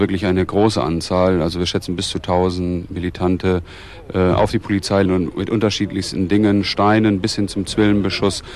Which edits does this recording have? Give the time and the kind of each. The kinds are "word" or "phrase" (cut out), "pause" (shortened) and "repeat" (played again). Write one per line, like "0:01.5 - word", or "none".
0:05.1 - phrase